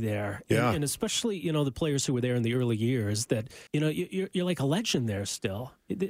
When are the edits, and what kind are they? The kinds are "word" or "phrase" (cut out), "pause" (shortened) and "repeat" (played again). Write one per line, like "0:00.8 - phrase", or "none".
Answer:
0:03.7 - pause